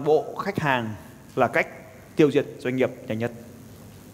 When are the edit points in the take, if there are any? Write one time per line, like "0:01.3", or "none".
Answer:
none